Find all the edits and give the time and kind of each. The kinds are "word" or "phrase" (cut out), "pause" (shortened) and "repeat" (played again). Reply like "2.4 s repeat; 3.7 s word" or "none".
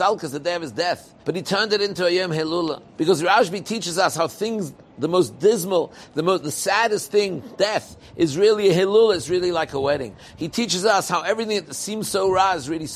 1.2 s pause; 2.9 s pause